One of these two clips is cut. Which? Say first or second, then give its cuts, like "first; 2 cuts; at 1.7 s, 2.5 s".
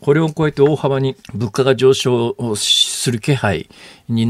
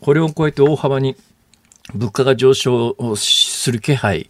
first; 1 cut; at 1.2 s